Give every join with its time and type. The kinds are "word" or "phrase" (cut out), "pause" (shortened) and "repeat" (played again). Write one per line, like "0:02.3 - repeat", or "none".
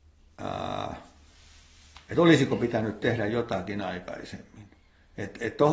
none